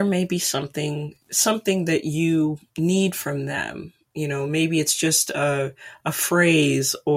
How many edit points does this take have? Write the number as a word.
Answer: two